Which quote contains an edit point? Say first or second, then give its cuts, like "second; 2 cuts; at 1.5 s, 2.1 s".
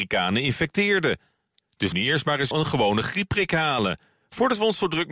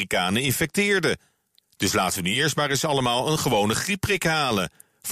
first; 2 cuts; at 1.9 s, 2.5 s